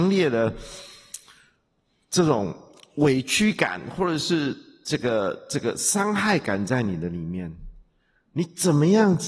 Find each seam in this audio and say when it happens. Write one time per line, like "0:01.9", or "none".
none